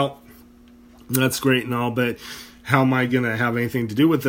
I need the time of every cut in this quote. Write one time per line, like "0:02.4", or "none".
none